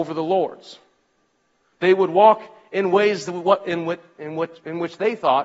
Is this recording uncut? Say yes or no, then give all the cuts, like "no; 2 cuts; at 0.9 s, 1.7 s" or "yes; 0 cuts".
yes; 0 cuts